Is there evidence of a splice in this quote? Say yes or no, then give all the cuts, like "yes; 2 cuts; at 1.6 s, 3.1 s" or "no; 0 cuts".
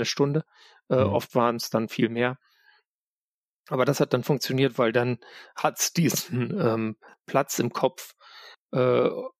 no; 0 cuts